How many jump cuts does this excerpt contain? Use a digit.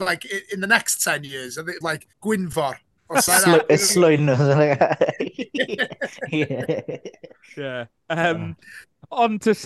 4